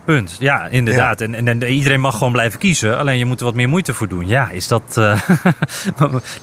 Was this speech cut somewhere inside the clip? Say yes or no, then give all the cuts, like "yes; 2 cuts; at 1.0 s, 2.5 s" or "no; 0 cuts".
no; 0 cuts